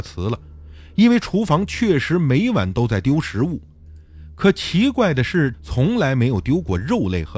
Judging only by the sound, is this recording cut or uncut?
cut